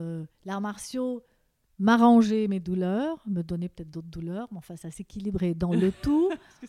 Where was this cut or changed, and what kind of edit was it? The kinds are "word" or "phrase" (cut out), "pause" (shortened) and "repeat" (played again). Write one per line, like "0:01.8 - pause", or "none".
none